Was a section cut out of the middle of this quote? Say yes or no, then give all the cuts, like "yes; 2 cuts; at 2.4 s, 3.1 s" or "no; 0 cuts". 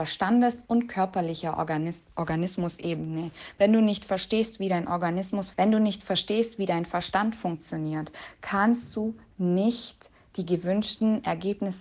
yes; 1 cut; at 5.5 s